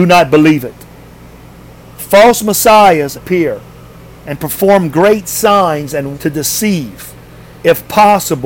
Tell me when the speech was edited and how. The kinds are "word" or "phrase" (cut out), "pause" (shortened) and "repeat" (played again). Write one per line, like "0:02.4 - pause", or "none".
0:03.1 - phrase
0:06.1 - word